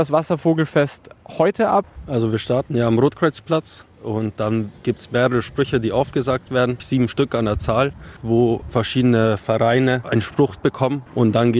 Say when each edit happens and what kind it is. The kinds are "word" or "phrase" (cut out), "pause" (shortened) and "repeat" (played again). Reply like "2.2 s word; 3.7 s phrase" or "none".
none